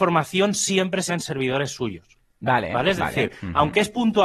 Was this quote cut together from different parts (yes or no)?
yes